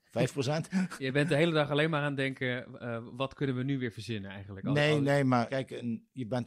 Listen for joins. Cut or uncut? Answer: uncut